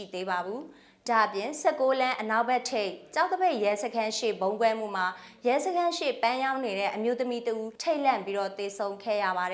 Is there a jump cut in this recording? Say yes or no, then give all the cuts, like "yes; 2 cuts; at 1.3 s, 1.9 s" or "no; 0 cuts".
yes; 1 cut; at 7.8 s